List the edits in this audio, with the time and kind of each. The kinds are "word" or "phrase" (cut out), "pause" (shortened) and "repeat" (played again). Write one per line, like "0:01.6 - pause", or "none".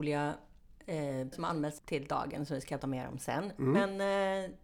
0:01.3 - word
0:01.8 - word
0:02.8 - word